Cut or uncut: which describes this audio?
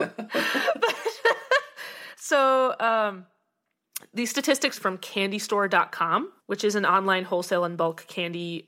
cut